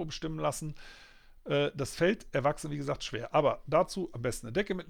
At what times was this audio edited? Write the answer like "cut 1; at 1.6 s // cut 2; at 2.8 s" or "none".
none